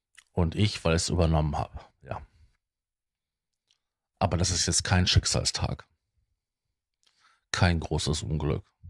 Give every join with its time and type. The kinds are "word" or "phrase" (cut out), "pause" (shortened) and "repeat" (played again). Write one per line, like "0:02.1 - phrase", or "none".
none